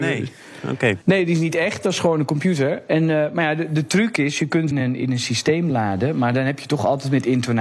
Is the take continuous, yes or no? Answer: no